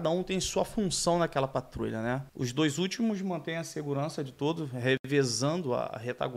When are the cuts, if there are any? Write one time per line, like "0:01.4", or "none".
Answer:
0:02.3